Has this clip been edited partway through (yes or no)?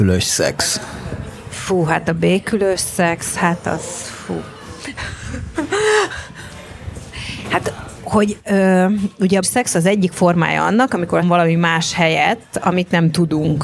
yes